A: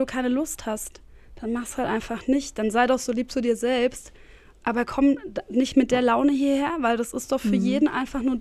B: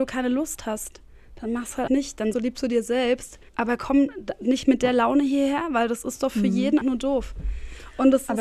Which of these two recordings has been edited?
B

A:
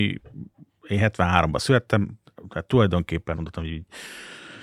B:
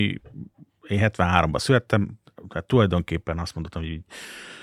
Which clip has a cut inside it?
A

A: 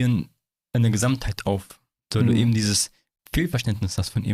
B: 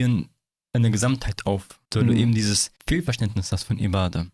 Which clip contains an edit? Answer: B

